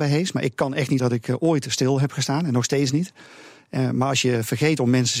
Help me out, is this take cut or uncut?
cut